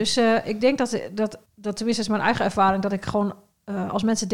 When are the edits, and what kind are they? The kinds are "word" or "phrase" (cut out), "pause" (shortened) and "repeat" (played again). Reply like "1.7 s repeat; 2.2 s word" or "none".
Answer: 1.4 s pause